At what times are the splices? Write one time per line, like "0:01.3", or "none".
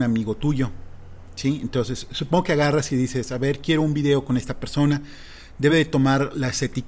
none